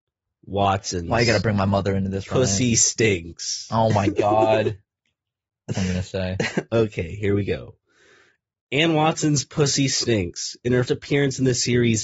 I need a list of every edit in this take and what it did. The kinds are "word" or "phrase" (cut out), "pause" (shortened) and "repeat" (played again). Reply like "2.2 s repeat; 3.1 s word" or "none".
4.8 s pause; 5.7 s word; 10.9 s word